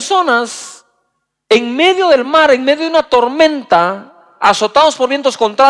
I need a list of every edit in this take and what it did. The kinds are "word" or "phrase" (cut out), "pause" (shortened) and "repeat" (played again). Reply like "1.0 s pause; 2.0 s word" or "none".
none